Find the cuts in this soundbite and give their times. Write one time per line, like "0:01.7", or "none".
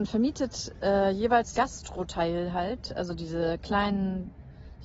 0:01.6